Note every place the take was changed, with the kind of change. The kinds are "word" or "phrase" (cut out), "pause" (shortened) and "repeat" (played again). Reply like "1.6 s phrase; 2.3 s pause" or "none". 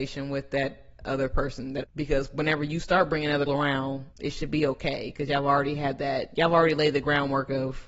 1.8 s phrase; 3.5 s word; 4.1 s pause